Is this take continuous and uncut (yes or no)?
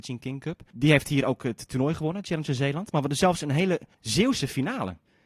no